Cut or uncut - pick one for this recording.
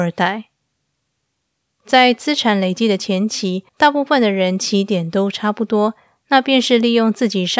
cut